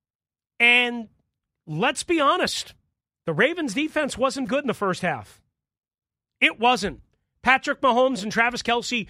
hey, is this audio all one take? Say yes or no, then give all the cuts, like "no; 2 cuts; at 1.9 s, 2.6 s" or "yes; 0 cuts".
no; 1 cut; at 4.5 s